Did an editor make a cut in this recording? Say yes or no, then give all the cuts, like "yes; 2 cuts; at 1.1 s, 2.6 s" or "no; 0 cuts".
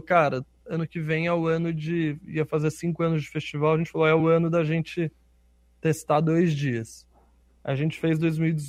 no; 0 cuts